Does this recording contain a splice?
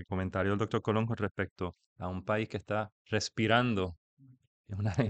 yes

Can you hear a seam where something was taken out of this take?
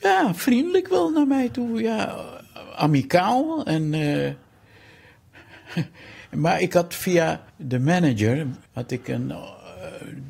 yes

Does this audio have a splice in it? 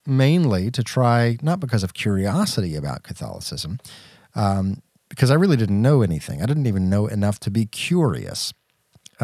no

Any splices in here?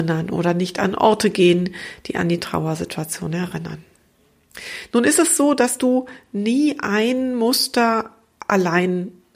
no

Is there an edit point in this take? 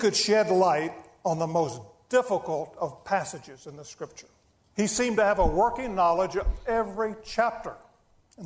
no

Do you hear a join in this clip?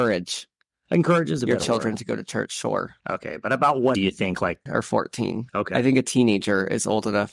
yes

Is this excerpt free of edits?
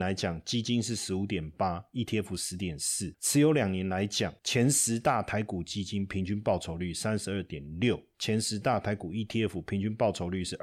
yes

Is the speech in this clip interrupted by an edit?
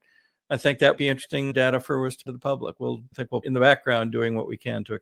yes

